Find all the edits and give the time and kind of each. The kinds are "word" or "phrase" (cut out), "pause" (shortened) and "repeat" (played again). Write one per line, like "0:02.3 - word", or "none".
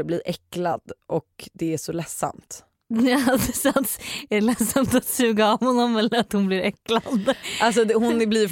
none